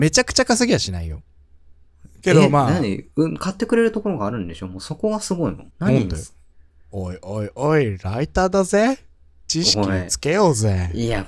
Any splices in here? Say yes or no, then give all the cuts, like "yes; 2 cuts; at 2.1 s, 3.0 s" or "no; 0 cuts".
yes; 1 cut; at 5.7 s